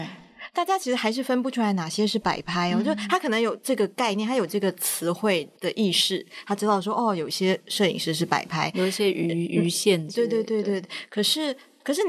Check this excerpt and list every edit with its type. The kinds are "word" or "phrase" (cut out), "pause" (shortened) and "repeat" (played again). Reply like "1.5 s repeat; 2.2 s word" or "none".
5.6 s pause